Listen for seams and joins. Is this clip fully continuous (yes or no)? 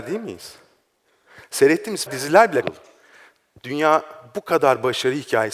no